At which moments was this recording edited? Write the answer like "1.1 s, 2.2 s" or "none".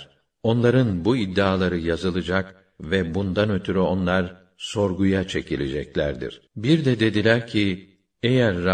6.5 s